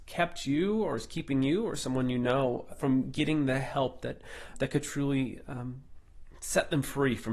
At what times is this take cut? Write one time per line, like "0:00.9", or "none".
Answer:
0:02.7
0:04.5